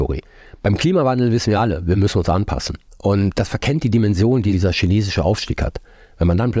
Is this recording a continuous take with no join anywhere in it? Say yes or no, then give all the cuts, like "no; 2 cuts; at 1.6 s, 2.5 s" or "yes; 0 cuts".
yes; 0 cuts